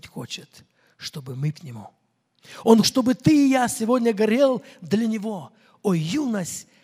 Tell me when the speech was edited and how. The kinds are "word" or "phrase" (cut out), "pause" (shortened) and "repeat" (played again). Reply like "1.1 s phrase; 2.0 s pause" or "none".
1.5 s word; 2.8 s word